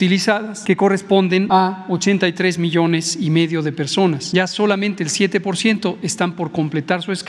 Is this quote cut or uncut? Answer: uncut